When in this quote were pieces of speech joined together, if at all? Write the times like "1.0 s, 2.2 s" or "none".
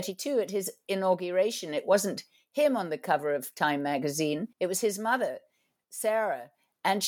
4.5 s